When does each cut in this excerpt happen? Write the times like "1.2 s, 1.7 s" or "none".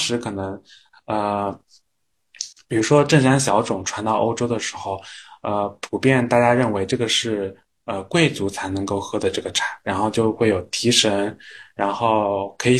none